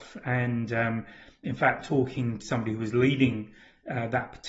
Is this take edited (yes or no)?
yes